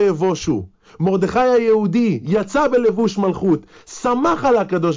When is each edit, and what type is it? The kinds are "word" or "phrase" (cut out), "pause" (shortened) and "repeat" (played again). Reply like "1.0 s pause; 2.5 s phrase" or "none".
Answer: none